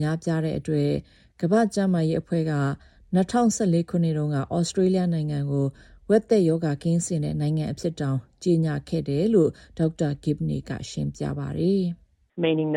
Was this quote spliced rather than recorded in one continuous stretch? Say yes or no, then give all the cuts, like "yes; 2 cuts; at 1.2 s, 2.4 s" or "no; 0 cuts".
no; 0 cuts